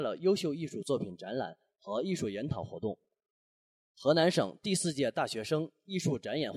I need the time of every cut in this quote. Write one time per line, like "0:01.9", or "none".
none